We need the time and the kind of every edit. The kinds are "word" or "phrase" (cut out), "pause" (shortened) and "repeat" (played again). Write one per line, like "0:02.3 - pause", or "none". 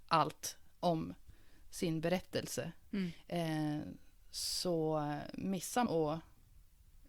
0:05.9 - word